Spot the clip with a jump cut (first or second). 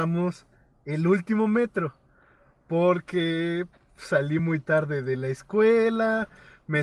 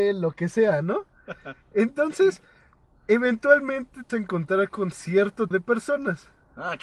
second